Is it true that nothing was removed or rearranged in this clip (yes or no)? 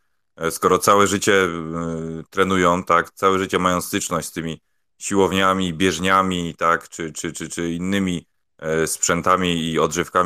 yes